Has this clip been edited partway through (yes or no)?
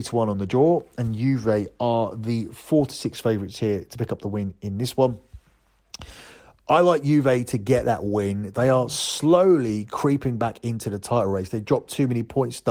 no